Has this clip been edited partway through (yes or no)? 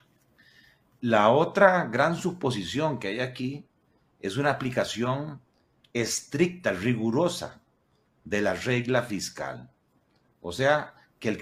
no